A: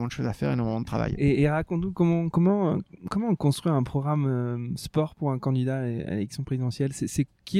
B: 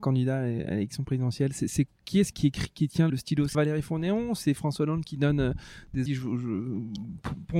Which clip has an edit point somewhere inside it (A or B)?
B